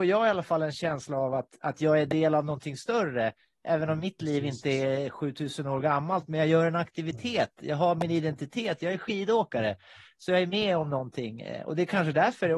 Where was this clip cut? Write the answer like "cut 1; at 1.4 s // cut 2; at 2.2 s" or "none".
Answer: none

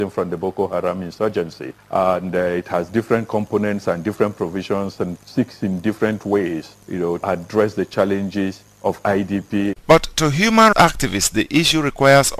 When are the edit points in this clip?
cut 1; at 5.2 s // cut 2; at 6.8 s // cut 3; at 7.2 s // cut 4; at 10.7 s

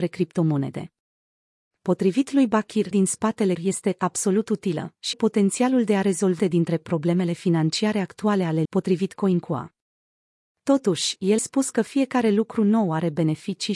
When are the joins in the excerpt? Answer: cut 1; at 2.9 s // cut 2; at 3.5 s // cut 3; at 5.1 s // cut 4; at 6.4 s // cut 5; at 8.6 s // cut 6; at 11.4 s

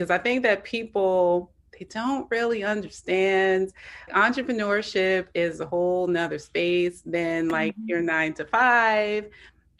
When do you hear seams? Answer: cut 1; at 4.1 s

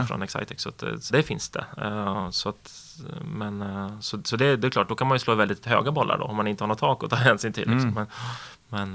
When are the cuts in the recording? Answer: cut 1; at 1.1 s

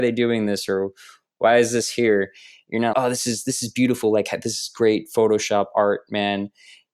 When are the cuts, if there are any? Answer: cut 1; at 2.9 s

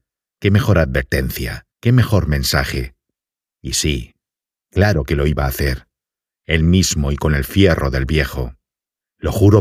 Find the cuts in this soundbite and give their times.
cut 1; at 1.7 s

